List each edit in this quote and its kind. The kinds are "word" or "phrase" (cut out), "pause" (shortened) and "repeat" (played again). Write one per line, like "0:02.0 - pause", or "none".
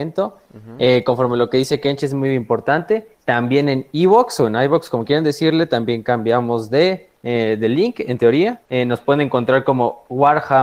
0:03.1 - pause
0:07.2 - pause
0:08.6 - pause

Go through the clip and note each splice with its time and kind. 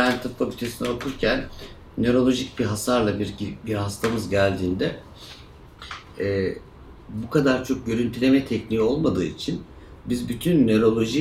0:07.0 - pause

